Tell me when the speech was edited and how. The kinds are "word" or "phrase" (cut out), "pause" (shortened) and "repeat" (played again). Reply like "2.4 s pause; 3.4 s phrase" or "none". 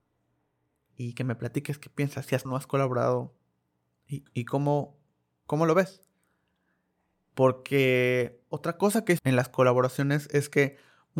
2.4 s word; 4.3 s word; 8.5 s word; 9.2 s word